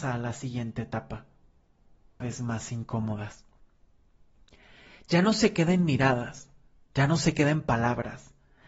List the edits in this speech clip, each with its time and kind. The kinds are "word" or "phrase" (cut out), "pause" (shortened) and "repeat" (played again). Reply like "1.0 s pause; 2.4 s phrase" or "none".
2.2 s phrase